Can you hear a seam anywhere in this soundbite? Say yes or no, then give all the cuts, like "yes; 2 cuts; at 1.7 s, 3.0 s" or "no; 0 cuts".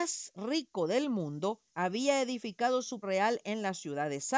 yes; 2 cuts; at 1.7 s, 3.0 s